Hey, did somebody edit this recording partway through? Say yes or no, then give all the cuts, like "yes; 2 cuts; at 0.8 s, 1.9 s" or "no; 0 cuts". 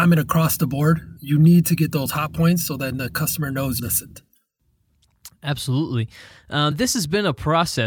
yes; 3 cuts; at 1.2 s, 3.8 s, 6.7 s